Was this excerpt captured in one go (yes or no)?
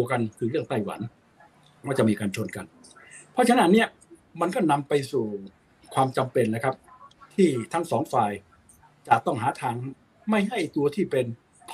yes